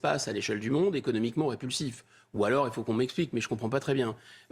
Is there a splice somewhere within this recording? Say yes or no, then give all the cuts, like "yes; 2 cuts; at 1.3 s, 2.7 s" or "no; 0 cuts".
no; 0 cuts